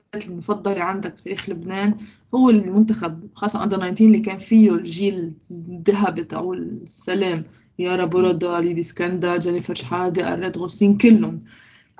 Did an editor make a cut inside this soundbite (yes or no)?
no